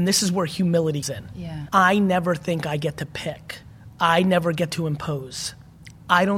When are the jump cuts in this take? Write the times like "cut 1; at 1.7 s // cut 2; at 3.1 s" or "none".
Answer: cut 1; at 1.0 s